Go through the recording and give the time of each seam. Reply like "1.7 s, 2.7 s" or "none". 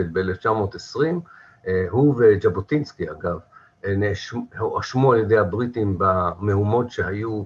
none